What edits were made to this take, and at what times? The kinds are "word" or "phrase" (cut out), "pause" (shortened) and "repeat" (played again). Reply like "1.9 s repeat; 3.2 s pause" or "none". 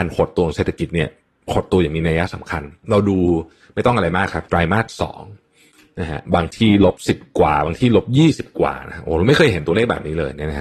4.5 s word

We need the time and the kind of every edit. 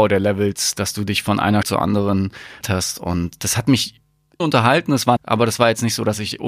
1.6 s word; 2.6 s word; 4.4 s word; 5.2 s word

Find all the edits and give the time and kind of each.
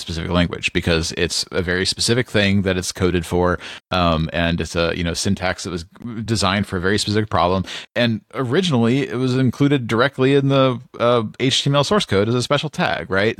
none

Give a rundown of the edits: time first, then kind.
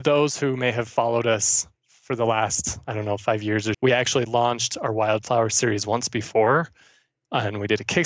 3.7 s word

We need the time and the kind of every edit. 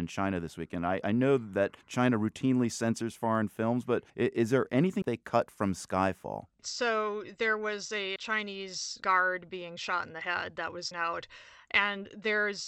1.0 s word; 1.8 s pause; 4.1 s pause; 5.0 s phrase; 6.5 s pause; 8.2 s word; 10.9 s word

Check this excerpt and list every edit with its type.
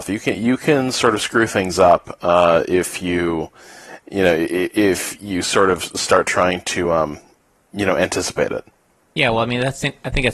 none

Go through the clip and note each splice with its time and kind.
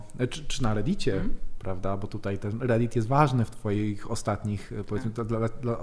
none

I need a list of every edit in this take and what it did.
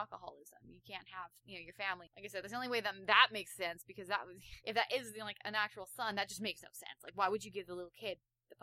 1.4 s pause; 4.6 s pause

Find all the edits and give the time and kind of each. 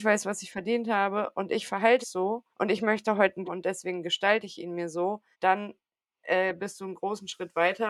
2.0 s word; 2.5 s pause; 3.4 s phrase; 5.3 s pause

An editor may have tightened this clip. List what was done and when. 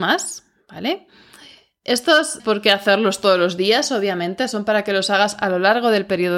2.4 s phrase

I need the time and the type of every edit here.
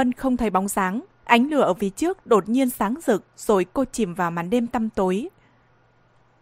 1.1 s pause

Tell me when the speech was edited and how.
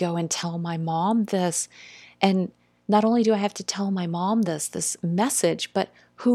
none

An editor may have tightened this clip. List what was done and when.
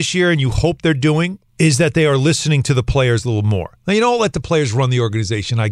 1.5 s pause

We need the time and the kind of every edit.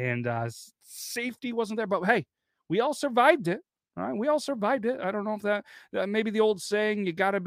none

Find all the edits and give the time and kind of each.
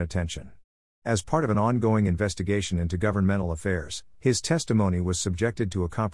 none

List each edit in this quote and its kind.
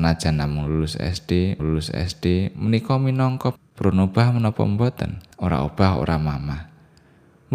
1.6 s repeat; 3.6 s word; 5.3 s pause

